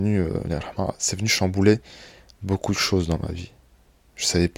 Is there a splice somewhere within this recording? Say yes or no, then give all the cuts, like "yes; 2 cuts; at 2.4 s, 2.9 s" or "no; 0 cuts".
no; 0 cuts